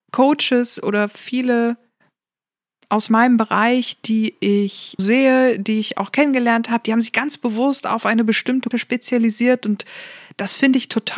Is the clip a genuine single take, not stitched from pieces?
no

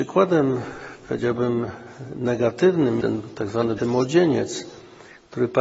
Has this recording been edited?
yes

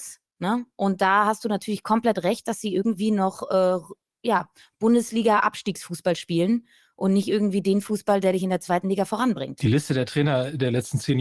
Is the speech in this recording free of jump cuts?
yes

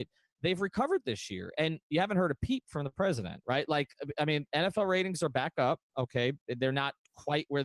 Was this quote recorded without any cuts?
yes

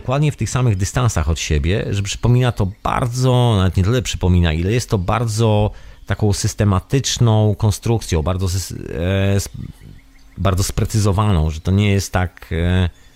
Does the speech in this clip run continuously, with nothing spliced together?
yes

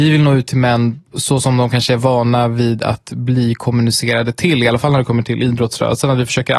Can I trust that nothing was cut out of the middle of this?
yes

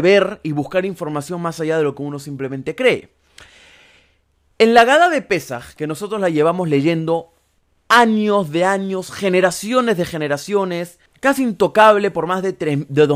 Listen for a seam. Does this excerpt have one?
yes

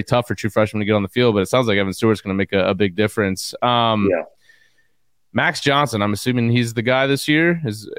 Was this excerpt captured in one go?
yes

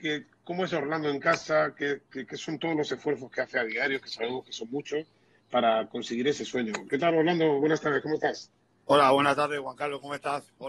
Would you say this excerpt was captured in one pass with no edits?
yes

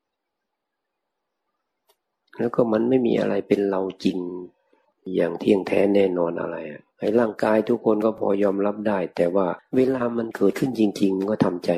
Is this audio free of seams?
no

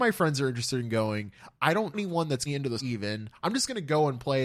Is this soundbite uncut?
no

